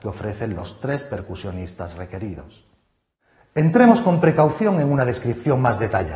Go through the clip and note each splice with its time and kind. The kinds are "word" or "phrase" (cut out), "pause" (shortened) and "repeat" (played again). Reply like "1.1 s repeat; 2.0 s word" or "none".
none